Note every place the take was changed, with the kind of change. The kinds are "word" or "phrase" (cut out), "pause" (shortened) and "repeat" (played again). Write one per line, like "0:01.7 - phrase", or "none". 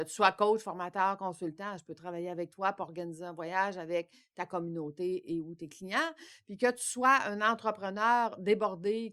none